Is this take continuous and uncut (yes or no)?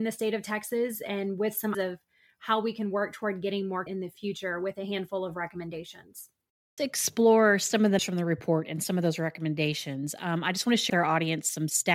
no